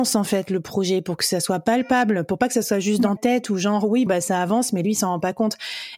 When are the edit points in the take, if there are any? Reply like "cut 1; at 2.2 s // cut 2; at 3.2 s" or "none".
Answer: cut 1; at 3.2 s // cut 2; at 4.1 s